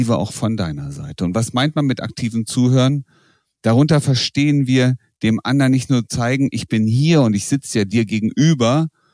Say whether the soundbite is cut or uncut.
uncut